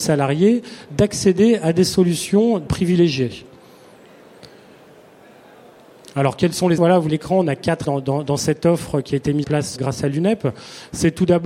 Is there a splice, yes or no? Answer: yes